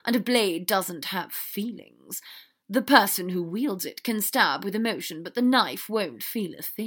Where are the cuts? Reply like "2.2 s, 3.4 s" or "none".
none